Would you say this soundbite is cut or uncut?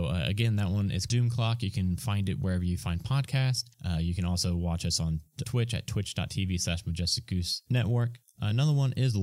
cut